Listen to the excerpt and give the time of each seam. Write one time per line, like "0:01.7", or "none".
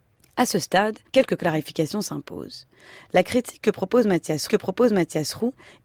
0:01.1
0:04.5